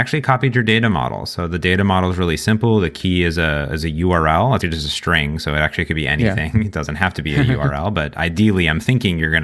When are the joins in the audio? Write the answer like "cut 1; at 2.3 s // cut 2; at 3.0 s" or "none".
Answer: cut 1; at 4.6 s